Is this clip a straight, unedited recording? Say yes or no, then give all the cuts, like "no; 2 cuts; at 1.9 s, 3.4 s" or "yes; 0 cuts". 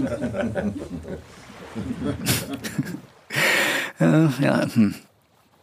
yes; 0 cuts